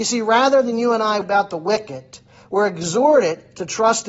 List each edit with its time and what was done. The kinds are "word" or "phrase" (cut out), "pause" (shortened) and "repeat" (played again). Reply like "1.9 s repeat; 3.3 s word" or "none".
1.2 s word